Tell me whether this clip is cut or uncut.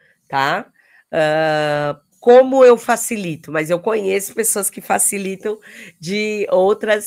cut